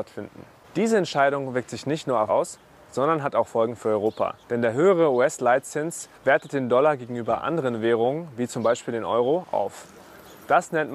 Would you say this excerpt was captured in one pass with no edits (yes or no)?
no